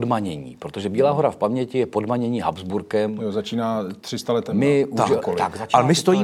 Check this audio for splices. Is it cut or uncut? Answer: uncut